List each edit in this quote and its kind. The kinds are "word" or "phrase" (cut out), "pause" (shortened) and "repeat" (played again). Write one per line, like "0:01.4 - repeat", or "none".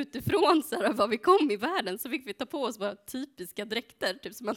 none